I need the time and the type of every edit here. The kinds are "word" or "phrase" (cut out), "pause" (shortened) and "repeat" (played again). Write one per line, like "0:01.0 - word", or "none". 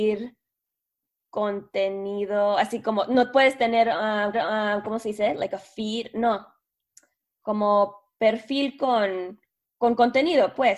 0:04.3 - repeat